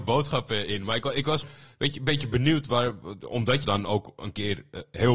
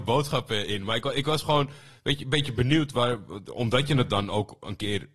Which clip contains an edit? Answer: first; 2 cuts; at 1.4 s, 3.6 s

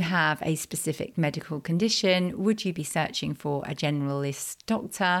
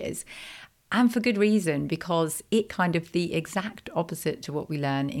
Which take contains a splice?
second; 1 cut; at 2.7 s

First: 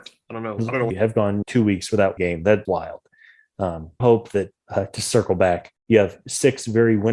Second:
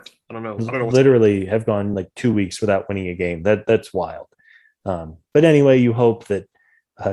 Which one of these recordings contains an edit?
first; 7 cuts; at 0.9 s, 1.4 s, 2.2 s, 2.7 s, 4.0 s, 4.6 s, 5.8 s

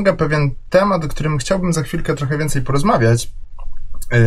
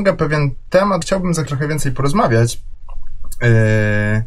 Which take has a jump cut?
second; 2 cuts; at 1.0 s, 1.5 s

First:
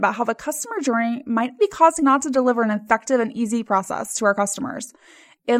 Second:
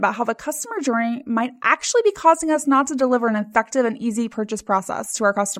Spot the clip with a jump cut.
first; 3 cuts; at 1.6 s, 2.0 s, 3.6 s

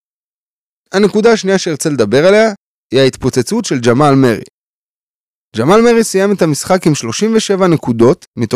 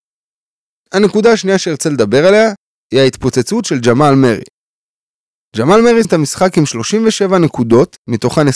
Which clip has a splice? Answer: second; 1 cut; at 6.0 s

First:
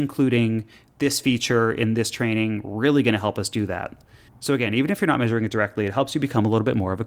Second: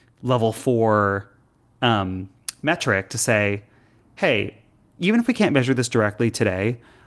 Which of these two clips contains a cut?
first; 1 cut; at 4.3 s

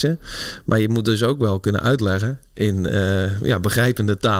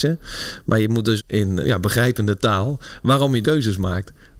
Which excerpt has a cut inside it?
second; 3 cuts; at 1.2 s, 1.6 s, 3.4 s

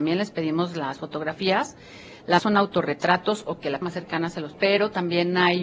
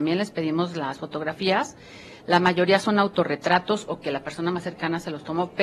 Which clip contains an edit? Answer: first; 3 cuts; at 2.4 s, 3.8 s, 4.5 s

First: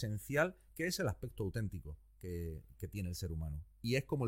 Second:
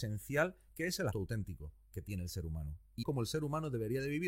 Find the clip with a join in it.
second; 3 cuts; at 1.1 s, 1.9 s, 3.0 s

